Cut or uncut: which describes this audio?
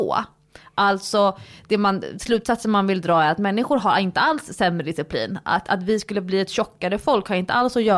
uncut